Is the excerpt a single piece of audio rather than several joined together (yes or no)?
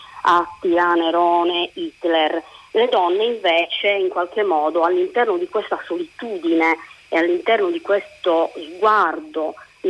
yes